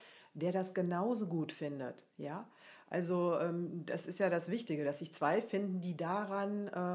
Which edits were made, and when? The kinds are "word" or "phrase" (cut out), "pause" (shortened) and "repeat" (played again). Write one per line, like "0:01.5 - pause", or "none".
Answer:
0:02.1 - pause